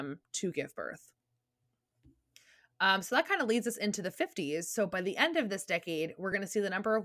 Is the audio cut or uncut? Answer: uncut